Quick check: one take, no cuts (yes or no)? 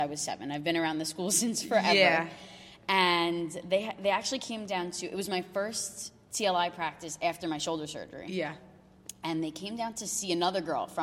yes